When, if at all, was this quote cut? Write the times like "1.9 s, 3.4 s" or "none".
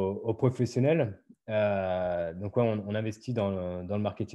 none

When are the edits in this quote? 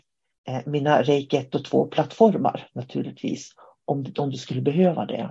none

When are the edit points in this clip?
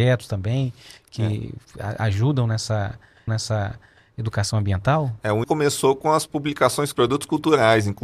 1.6 s, 3.3 s, 5.4 s, 6.9 s

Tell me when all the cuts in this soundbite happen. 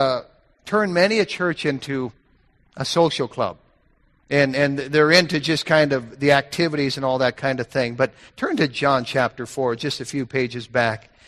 none

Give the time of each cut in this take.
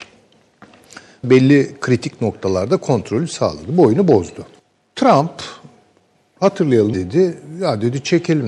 1.2 s, 4.6 s, 6.9 s

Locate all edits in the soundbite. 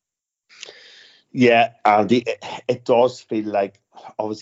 1.8 s

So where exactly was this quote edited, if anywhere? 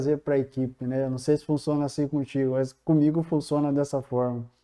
none

